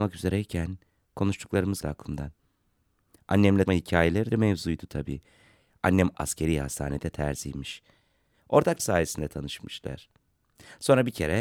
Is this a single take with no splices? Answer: no; 5 cuts; at 1.8 s, 3.7 s, 4.3 s, 6.1 s, 8.8 s

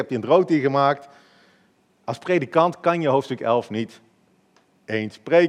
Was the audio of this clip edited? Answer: no; 0 cuts

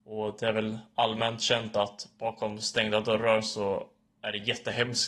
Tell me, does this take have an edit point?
no; 0 cuts

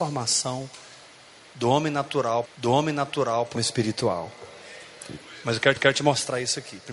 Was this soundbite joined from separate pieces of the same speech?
yes; 3 cuts; at 2.5 s, 3.6 s, 5.8 s

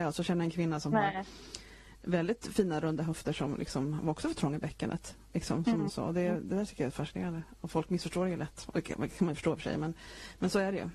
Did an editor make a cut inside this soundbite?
no; 0 cuts

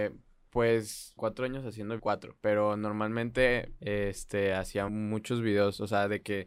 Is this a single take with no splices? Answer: no; 4 cuts; at 1.2 s, 2.0 s, 3.8 s, 4.9 s

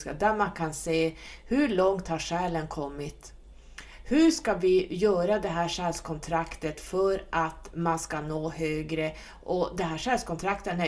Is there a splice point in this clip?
no; 0 cuts

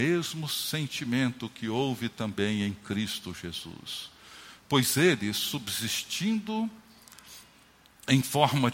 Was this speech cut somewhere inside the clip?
no; 0 cuts

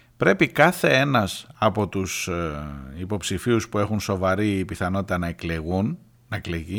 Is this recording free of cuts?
yes; 0 cuts

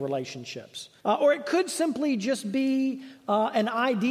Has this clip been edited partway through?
yes; 1 cut; at 1.0 s

